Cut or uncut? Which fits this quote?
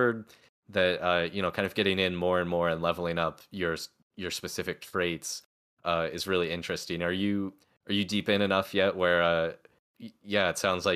uncut